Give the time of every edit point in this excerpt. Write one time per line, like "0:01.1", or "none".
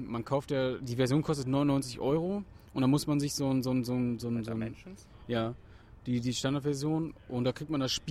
none